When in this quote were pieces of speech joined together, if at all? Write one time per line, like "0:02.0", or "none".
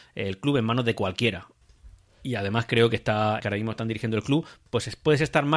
0:03.4

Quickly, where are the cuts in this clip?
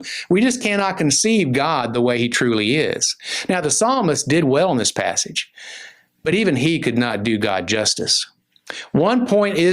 none

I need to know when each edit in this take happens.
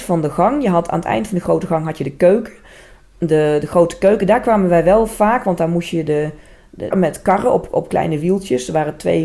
0:06.9

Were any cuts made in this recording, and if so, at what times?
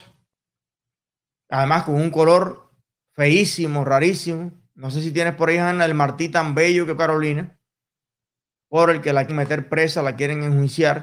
0:07.0
0:09.3

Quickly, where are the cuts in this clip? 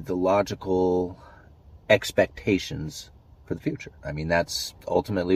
0:04.0

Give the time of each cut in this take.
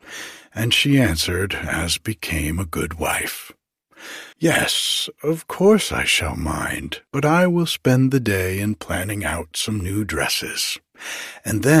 0:04.3
0:07.1

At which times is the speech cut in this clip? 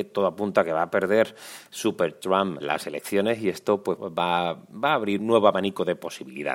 0:02.6
0:04.0
0:05.2

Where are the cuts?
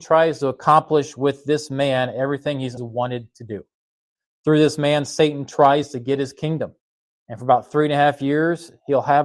0:02.8

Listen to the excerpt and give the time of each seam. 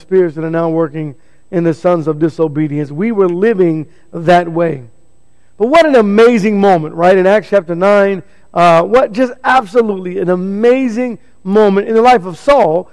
none

